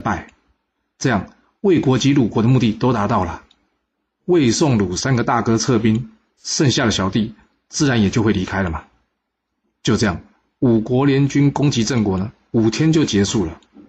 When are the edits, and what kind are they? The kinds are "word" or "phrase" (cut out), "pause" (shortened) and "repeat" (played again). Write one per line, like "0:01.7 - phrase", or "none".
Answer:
none

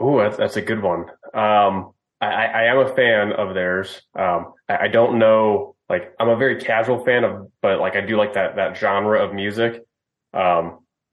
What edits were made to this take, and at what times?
0:02.1 - pause
0:04.6 - pause
0:05.8 - pause

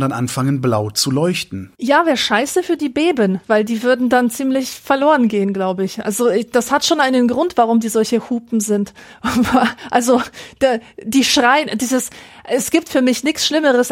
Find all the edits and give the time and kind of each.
0:01.7 - pause

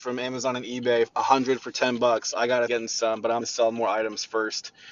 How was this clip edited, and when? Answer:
0:02.7 - word
0:03.4 - word

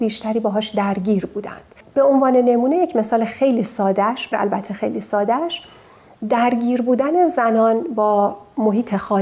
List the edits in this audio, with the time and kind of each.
0:04.3 - word

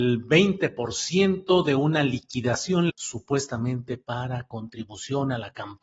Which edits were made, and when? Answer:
0:02.9 - word

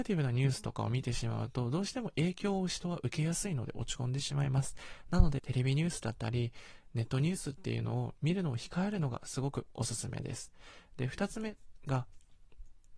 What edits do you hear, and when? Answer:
0:05.4 - phrase

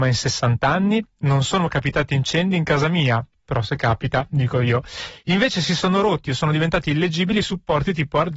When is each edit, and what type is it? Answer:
0:07.4 - word

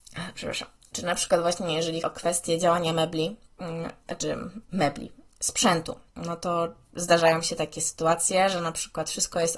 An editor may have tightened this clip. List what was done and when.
0:02.0 - word
0:06.1 - pause

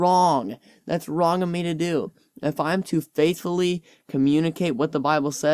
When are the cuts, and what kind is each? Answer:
none

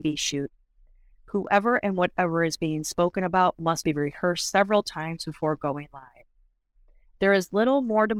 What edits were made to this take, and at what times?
none

